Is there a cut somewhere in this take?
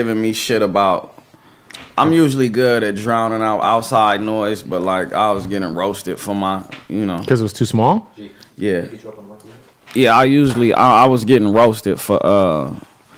no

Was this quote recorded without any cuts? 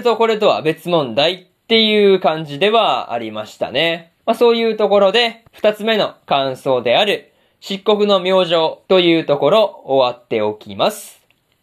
no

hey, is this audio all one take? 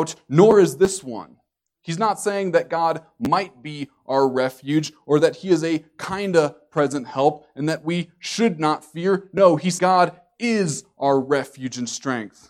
no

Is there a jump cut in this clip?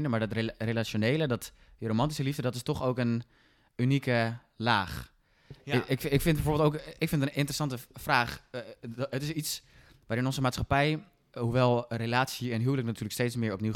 no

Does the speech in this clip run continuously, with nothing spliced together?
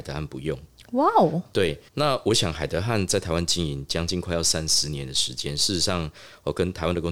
no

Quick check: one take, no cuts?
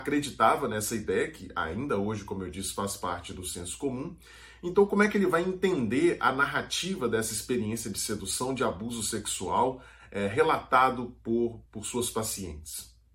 no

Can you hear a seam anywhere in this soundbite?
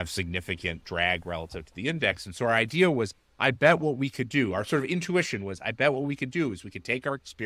no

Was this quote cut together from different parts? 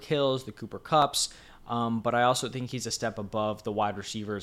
no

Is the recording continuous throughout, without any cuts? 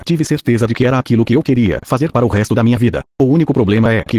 no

